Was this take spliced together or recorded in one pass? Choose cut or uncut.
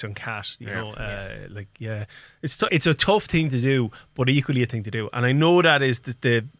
cut